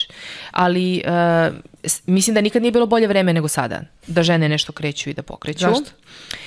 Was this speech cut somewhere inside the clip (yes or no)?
yes